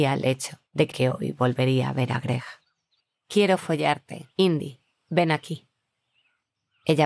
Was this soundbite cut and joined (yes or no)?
yes